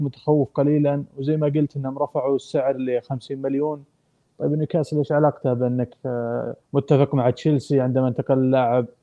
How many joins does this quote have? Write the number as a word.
one